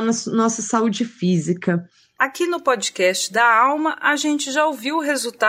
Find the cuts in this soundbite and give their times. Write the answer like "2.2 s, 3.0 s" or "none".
none